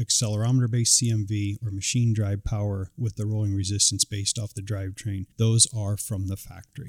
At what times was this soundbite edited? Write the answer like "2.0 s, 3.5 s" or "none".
5.3 s